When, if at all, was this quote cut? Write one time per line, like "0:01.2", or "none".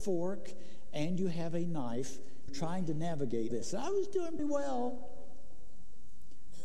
0:02.5
0:03.5
0:04.4